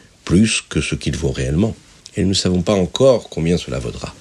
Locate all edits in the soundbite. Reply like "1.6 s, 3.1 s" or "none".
2.0 s